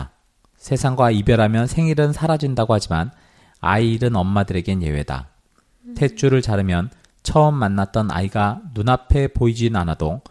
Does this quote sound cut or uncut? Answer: uncut